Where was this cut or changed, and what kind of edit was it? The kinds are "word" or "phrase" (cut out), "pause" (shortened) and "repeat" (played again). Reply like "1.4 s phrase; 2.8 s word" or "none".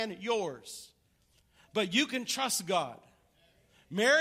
none